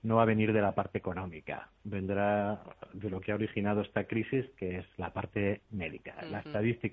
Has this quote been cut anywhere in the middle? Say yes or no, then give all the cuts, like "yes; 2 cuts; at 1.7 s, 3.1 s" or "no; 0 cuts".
yes; 1 cut; at 5.6 s